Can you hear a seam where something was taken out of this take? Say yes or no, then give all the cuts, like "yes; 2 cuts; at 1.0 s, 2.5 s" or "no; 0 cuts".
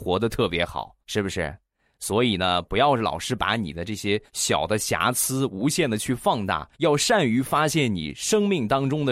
yes; 3 cuts; at 1.0 s, 4.3 s, 6.7 s